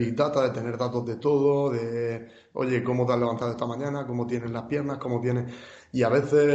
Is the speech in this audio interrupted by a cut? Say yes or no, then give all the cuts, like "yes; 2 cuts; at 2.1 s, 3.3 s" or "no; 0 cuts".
no; 0 cuts